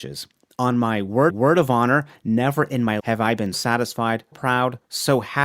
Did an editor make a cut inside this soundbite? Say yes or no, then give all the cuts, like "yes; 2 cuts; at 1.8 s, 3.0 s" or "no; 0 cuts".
yes; 4 cuts; at 1.3 s, 3.0 s, 3.5 s, 4.3 s